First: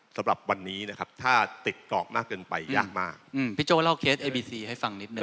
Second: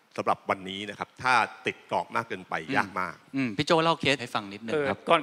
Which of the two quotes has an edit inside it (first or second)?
second